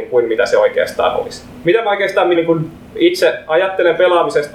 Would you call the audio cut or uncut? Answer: cut